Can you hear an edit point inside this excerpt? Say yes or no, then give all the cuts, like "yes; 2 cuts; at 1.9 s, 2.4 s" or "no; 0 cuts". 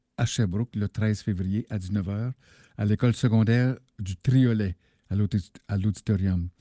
no; 0 cuts